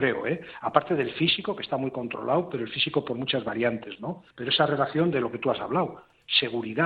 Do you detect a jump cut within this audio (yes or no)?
yes